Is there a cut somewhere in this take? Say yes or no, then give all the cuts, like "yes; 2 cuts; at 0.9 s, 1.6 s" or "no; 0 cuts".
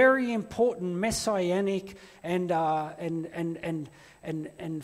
no; 0 cuts